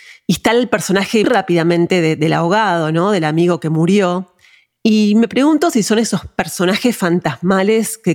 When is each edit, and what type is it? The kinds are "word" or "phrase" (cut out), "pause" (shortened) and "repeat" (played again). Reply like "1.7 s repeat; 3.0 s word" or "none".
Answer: 1.2 s word